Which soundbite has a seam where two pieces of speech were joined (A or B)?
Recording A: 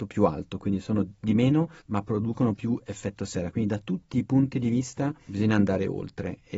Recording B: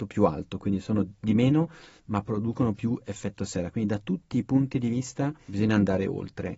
A